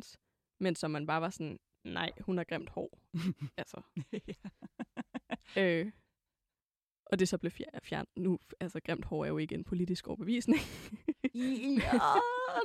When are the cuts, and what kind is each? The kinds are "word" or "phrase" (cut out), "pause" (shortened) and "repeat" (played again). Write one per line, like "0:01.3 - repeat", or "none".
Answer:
none